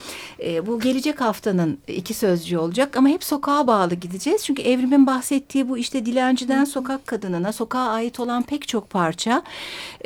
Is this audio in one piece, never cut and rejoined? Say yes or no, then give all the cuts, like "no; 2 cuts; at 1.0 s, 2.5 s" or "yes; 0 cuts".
yes; 0 cuts